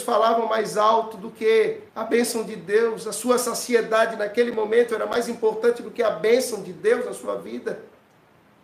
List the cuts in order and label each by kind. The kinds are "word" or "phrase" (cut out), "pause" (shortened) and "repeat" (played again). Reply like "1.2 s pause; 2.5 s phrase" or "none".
1.9 s pause